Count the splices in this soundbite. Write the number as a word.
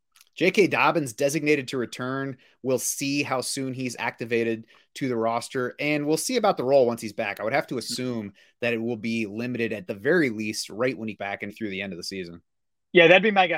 three